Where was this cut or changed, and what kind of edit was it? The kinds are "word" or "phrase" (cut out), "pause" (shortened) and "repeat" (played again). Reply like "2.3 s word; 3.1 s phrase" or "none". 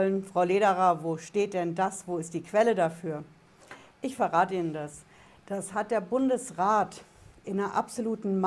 none